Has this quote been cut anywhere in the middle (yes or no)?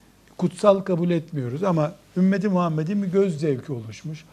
no